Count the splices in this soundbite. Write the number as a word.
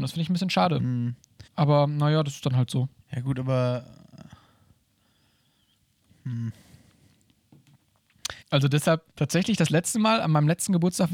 four